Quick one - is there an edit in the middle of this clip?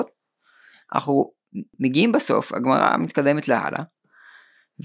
no; 0 cuts

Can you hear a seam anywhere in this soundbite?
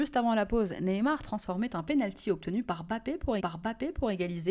yes; 1 cut; at 3.4 s

